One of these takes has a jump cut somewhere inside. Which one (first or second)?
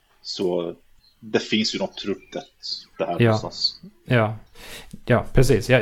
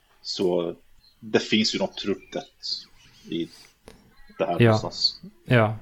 first